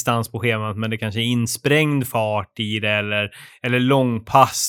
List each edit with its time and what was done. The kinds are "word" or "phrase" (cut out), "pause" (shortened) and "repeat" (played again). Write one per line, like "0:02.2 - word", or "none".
none